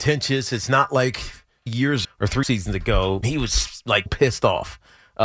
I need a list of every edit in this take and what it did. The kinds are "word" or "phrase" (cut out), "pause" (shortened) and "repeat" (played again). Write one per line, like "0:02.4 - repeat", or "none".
0:01.7 - word
0:02.0 - word
0:02.4 - word
0:03.2 - word
0:04.1 - word